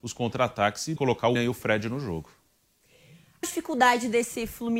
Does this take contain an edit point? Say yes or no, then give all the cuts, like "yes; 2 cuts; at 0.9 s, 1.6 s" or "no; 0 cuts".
yes; 3 cuts; at 1.0 s, 1.4 s, 3.4 s